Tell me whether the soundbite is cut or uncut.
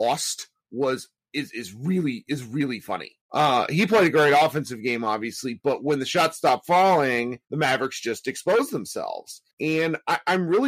cut